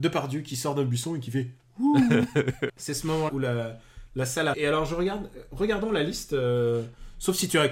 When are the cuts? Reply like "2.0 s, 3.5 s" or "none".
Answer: 2.7 s, 3.3 s, 4.5 s